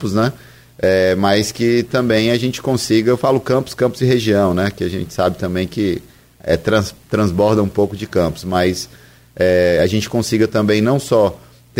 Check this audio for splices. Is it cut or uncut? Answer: uncut